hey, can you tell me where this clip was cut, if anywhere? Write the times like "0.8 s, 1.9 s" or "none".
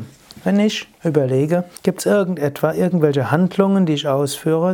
1.8 s